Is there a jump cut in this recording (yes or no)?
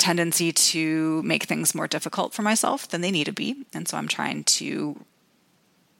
no